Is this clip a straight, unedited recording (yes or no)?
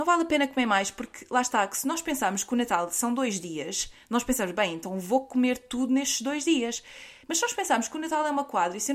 no